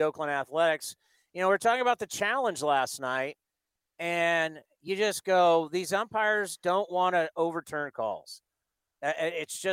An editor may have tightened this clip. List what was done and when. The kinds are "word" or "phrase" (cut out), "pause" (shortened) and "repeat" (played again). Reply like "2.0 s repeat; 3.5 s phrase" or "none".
none